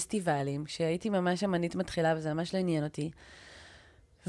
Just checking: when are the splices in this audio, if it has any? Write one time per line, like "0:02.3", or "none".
none